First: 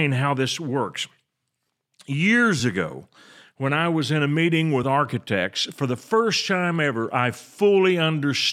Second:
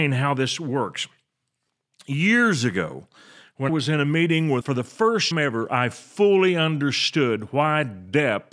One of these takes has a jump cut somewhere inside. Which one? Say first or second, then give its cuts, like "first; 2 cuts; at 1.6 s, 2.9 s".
second; 3 cuts; at 3.7 s, 4.6 s, 5.3 s